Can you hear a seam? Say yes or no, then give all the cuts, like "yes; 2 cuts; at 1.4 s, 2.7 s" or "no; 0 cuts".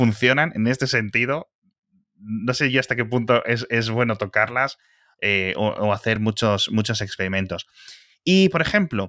no; 0 cuts